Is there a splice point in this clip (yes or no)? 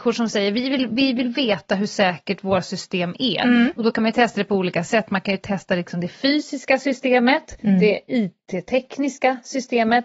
no